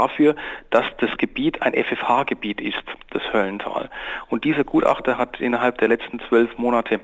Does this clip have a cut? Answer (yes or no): no